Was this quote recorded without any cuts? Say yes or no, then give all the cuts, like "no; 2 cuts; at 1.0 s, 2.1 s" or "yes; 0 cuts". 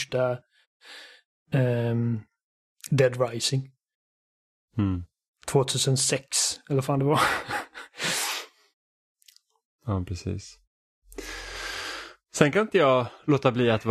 yes; 0 cuts